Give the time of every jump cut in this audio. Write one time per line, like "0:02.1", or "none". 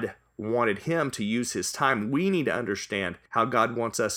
0:03.3